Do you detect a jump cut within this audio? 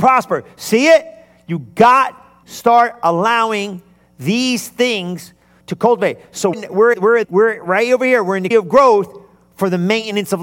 yes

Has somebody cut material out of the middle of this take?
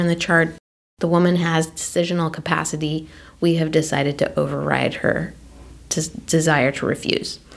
no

